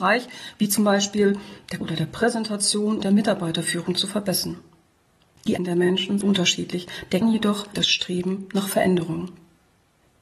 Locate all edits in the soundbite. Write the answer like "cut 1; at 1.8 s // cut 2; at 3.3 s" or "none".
cut 1; at 1.8 s // cut 2; at 3.0 s // cut 3; at 5.6 s // cut 4; at 6.2 s // cut 5; at 7.2 s // cut 6; at 7.7 s